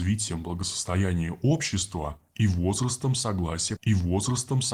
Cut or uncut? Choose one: cut